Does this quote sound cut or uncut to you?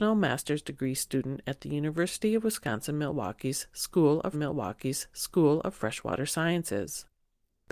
cut